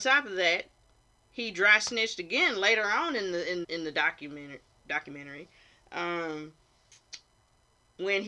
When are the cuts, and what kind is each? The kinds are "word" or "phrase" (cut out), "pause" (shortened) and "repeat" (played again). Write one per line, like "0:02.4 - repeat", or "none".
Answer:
0:03.6 - word